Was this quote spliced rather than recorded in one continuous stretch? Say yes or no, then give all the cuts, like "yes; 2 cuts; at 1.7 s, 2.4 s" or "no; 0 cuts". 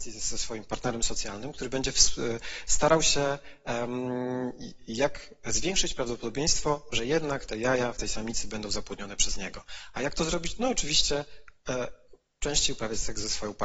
no; 0 cuts